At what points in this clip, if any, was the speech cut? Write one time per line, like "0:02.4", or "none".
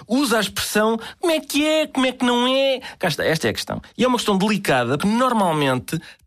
0:05.0